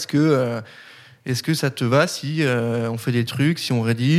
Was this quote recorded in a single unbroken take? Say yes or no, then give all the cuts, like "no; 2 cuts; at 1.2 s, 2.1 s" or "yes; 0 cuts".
yes; 0 cuts